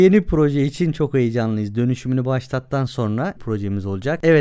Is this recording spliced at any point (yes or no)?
yes